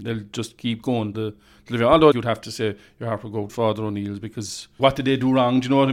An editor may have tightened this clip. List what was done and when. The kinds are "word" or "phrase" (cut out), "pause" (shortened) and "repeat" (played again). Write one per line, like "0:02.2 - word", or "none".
0:01.1 - word
0:02.1 - word
0:03.5 - word
0:04.8 - word